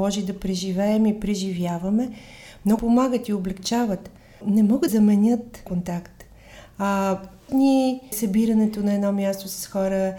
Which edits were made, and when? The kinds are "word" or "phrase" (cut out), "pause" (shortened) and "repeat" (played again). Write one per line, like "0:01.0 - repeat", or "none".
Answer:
0:02.8 - word
0:04.4 - word
0:04.9 - word
0:05.7 - word
0:07.5 - word
0:08.1 - word